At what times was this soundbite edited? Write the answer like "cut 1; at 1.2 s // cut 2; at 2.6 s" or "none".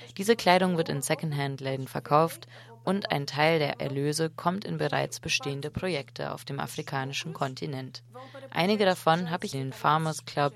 cut 1; at 9.5 s